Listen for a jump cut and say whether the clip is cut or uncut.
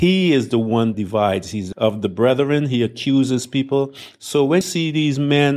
cut